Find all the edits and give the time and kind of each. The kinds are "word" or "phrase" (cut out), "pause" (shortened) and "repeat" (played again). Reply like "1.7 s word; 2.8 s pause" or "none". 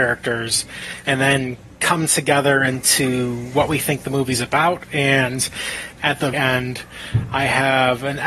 6.3 s word